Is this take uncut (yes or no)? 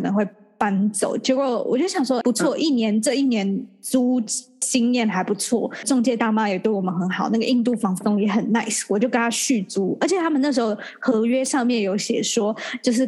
no